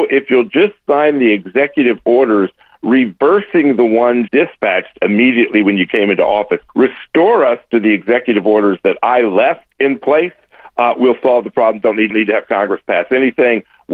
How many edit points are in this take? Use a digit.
4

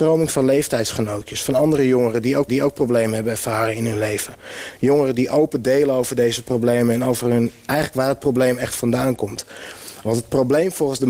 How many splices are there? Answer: 1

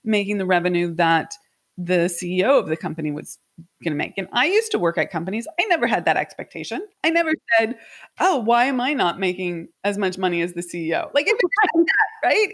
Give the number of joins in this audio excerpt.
2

